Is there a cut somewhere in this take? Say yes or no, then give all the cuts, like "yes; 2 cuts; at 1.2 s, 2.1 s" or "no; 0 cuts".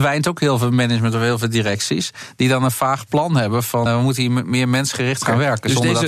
yes; 1 cut; at 3.9 s